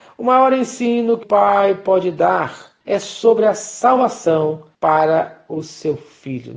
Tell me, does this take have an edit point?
yes; 3 cuts; at 1.2 s, 2.8 s, 4.7 s

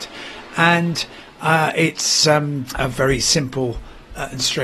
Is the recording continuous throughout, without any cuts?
yes; 0 cuts

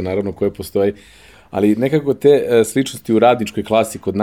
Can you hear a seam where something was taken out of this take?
no; 0 cuts

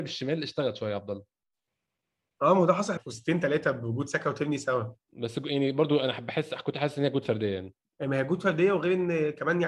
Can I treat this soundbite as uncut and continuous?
no; 2 cuts; at 3.0 s, 7.8 s

